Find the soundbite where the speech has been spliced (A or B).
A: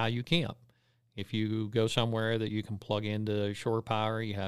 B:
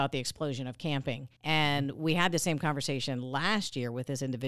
B